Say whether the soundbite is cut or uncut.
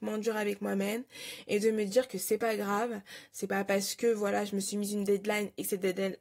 uncut